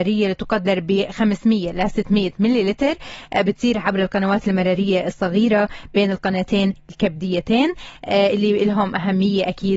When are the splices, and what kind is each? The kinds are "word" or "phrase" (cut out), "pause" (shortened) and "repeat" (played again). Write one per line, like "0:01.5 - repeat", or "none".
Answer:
none